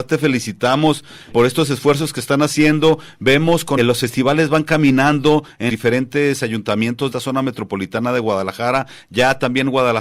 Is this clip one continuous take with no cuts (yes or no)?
no